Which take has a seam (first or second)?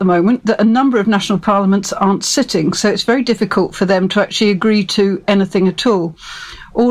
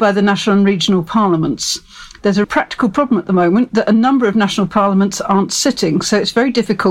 second